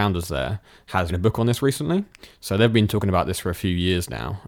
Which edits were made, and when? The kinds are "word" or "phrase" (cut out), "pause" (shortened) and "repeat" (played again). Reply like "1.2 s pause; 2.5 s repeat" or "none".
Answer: 1.1 s word